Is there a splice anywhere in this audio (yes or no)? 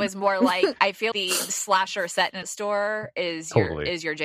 yes